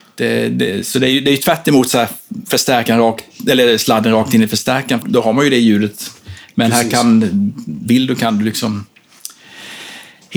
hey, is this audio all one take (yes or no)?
no